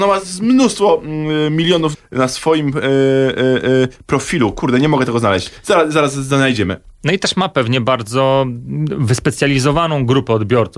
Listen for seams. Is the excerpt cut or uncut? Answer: cut